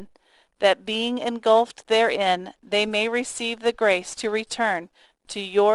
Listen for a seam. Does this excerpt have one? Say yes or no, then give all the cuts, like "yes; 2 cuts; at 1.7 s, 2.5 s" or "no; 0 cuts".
no; 0 cuts